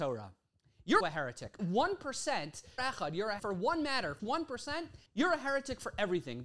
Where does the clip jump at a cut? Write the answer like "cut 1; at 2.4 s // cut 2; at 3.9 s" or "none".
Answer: cut 1; at 1.0 s // cut 2; at 1.6 s // cut 3; at 2.8 s // cut 4; at 3.4 s // cut 5; at 4.2 s // cut 6; at 5.1 s